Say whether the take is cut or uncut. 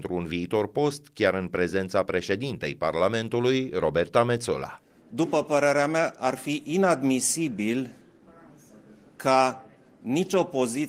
uncut